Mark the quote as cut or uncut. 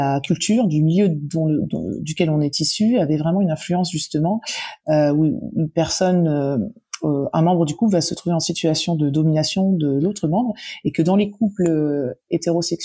uncut